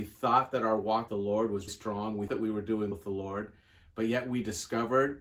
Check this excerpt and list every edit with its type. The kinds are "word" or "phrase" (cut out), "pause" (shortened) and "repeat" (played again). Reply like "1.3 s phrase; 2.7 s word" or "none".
1.1 s word; 1.7 s word; 2.3 s word; 2.9 s word